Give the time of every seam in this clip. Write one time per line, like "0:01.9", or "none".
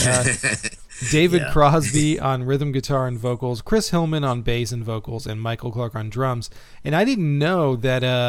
none